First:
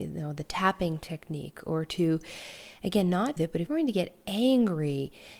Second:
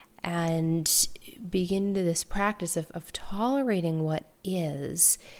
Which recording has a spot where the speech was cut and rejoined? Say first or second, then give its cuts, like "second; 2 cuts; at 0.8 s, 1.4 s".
first; 2 cuts; at 3.4 s, 3.7 s